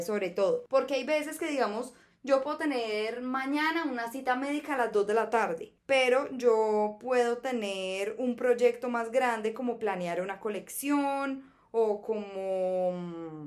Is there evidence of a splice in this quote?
no; 0 cuts

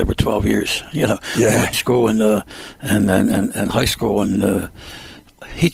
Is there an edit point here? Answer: yes; 1 cut; at 1.7 s

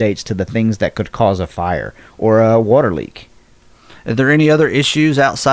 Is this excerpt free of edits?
yes; 0 cuts

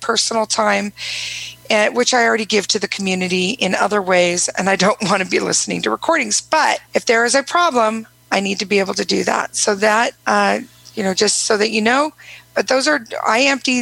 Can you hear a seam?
yes; 2 cuts; at 6.8 s, 10.2 s

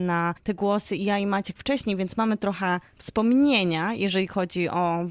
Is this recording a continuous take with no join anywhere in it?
yes; 0 cuts

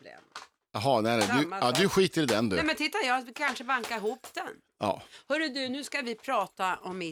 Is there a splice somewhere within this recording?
no; 0 cuts

